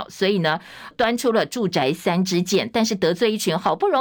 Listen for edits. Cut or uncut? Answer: cut